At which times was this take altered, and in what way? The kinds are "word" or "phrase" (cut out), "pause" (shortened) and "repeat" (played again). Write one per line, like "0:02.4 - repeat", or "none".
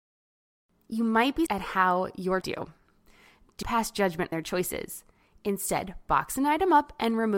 0:01.5 - word
0:02.4 - phrase
0:03.6 - word
0:04.3 - word